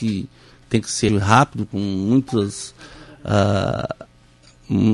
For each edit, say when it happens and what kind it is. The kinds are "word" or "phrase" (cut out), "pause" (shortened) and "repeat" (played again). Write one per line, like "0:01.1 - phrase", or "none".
0:01.1 - word